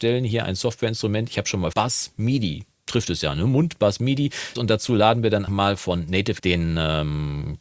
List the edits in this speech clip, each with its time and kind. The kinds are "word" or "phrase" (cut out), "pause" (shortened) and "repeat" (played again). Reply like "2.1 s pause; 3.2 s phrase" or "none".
1.7 s phrase; 4.6 s phrase; 5.5 s word; 6.4 s word